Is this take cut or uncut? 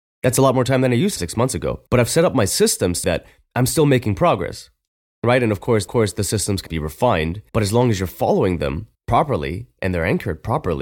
cut